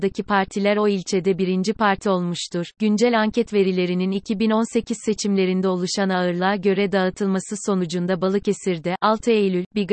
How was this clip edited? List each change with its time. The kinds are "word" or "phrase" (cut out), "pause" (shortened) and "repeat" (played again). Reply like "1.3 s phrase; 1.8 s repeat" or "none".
none

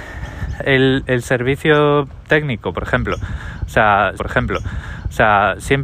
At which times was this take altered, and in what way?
4.2 s repeat

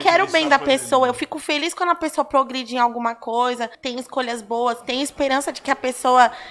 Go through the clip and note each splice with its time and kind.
3.7 s pause

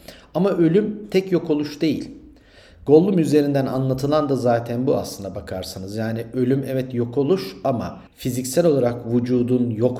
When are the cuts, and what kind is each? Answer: 8.1 s pause

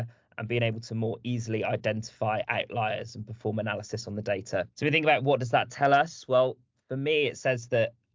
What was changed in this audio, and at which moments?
4.7 s pause

